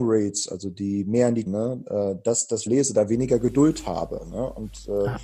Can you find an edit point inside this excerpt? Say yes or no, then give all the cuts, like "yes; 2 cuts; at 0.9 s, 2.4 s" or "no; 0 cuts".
yes; 2 cuts; at 1.5 s, 2.7 s